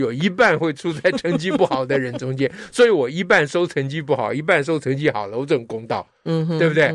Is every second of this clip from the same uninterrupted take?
yes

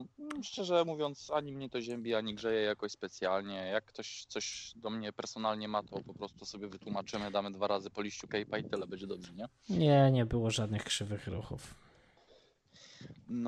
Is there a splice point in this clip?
yes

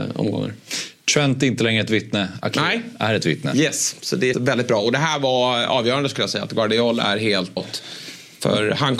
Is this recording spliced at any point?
yes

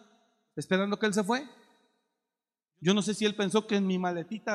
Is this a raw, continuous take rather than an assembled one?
yes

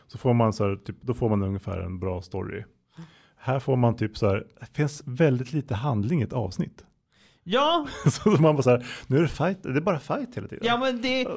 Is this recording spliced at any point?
no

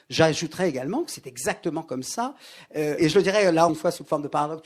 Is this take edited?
yes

